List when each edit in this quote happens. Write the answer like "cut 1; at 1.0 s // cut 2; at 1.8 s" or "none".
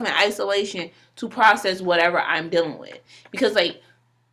none